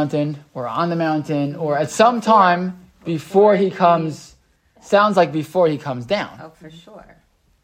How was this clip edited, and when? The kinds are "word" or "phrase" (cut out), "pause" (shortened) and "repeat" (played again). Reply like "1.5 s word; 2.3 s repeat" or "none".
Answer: none

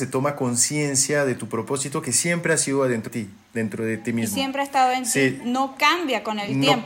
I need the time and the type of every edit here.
3.1 s word

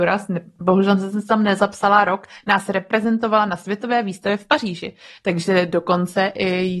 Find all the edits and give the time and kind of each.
none

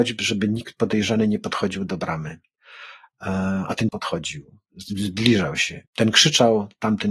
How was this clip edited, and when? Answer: 3.9 s word; 5.9 s pause

